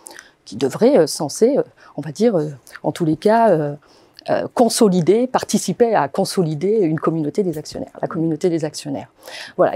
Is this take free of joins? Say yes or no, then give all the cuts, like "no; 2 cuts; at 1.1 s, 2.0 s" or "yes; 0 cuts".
yes; 0 cuts